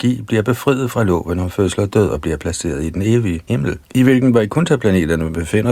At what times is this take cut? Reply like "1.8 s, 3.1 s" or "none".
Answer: 3.5 s, 3.8 s